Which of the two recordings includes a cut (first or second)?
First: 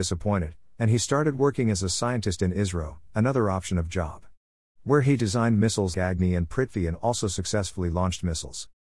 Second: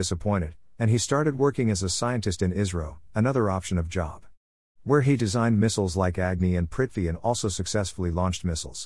first